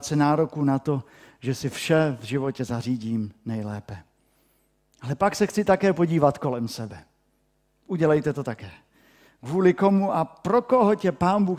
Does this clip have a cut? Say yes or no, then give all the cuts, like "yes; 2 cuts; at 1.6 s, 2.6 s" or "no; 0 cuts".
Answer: no; 0 cuts